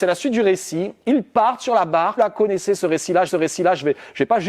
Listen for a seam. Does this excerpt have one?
yes; 2 cuts; at 2.2 s, 3.3 s

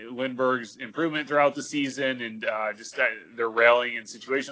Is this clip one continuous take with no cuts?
yes; 0 cuts

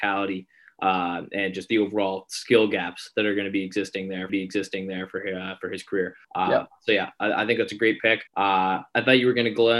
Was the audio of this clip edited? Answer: yes; 3 cuts; at 4.3 s, 6.2 s, 8.3 s

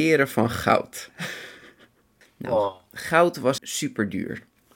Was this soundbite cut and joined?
yes; 1 cut; at 3.6 s

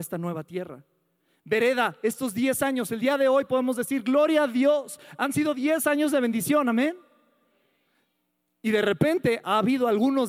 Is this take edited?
no; 0 cuts

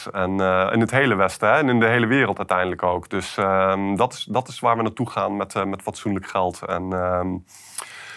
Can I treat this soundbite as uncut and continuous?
yes; 0 cuts

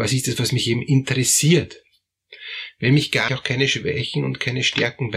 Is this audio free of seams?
no; 1 cut; at 3.3 s

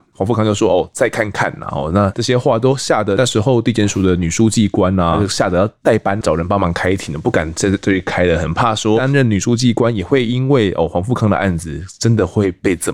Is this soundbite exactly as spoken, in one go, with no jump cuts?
no; 1 cut; at 6.2 s

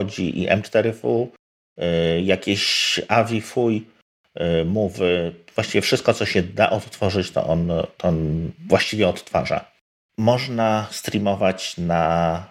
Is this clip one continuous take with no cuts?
yes; 0 cuts

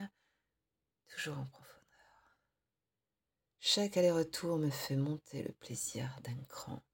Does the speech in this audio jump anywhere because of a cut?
no; 0 cuts

